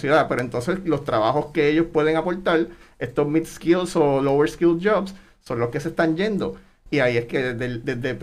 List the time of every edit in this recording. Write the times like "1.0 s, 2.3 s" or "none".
7.3 s